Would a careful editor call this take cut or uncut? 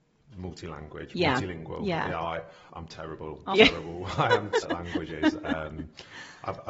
cut